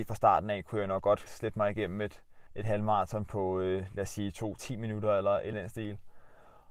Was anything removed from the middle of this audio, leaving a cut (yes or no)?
yes